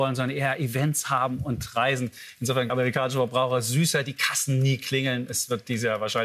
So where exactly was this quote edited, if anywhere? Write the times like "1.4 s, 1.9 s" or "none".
2.7 s

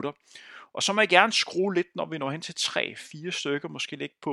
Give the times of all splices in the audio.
none

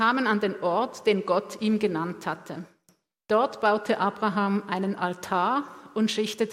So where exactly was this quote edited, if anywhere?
none

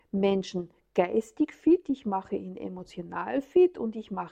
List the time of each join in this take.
none

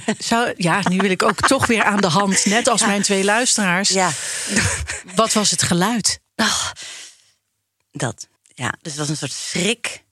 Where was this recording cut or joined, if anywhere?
6.3 s, 8.4 s

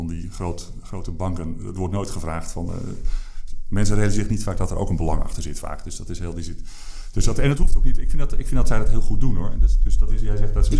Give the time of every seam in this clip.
none

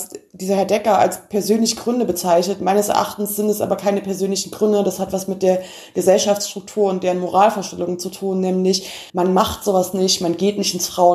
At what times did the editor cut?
9.1 s

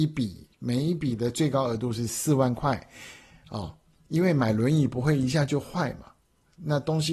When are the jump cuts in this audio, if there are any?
none

